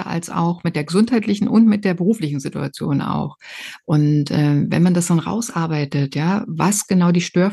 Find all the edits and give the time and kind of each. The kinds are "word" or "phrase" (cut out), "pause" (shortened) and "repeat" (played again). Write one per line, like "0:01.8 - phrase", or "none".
none